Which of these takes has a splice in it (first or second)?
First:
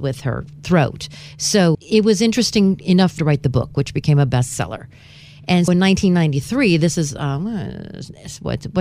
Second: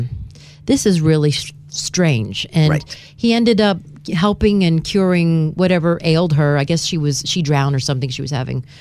first